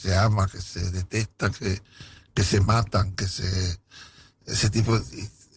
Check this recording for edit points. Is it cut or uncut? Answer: uncut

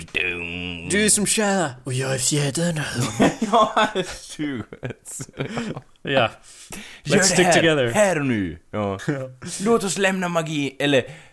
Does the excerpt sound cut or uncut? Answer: uncut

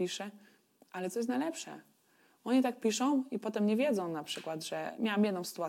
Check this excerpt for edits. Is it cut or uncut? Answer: uncut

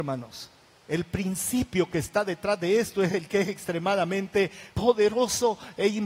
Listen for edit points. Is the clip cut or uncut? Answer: cut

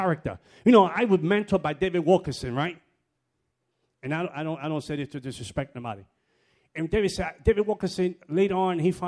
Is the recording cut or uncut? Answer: uncut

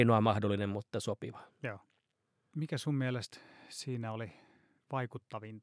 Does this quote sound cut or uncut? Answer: uncut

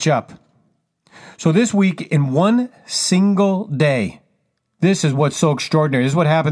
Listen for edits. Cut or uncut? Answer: uncut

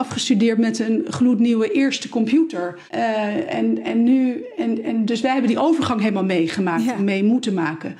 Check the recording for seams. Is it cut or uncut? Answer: cut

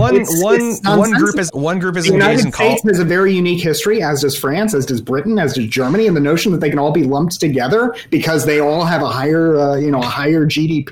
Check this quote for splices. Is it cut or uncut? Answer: cut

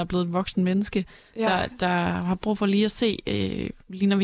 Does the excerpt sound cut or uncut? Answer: uncut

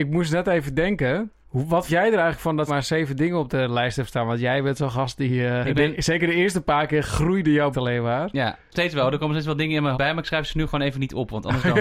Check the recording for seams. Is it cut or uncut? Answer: cut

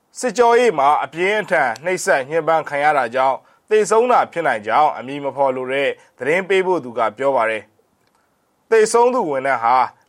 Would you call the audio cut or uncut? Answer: uncut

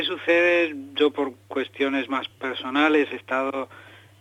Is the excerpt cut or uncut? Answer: uncut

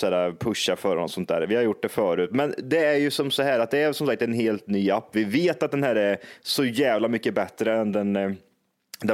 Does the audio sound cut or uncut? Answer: uncut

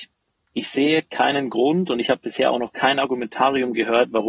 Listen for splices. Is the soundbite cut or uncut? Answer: uncut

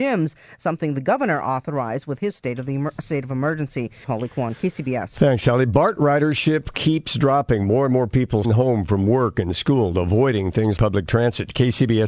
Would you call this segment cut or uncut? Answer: cut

